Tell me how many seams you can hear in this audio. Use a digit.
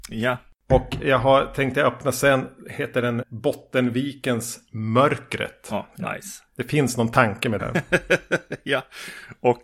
3